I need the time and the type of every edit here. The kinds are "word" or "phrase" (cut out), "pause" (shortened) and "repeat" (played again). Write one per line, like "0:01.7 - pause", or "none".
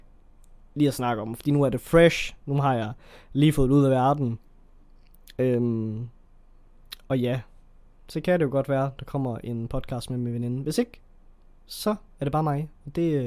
none